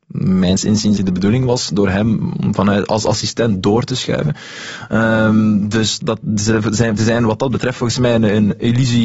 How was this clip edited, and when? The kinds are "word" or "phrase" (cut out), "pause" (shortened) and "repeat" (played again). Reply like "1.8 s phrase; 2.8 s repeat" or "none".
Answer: 1.0 s word; 6.0 s word; 7.0 s word